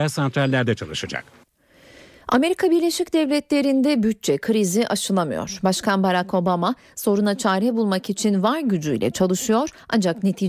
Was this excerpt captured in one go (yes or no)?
yes